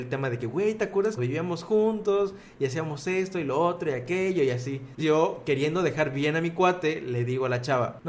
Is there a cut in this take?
yes; 2 cuts; at 1.2 s, 5.0 s

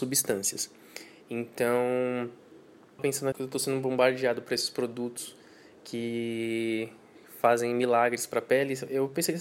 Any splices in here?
yes; 2 cuts; at 3.0 s, 3.3 s

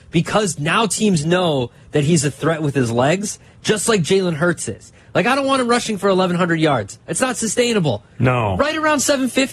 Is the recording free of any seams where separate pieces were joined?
yes; 0 cuts

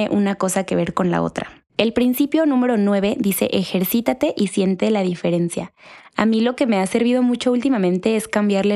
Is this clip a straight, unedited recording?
no; 1 cut; at 1.7 s

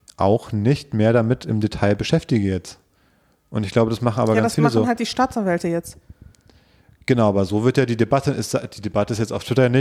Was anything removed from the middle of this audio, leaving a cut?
no; 0 cuts

